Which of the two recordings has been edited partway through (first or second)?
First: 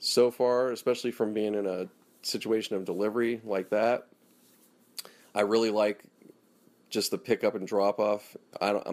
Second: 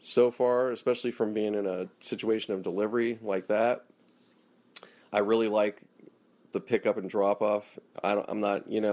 second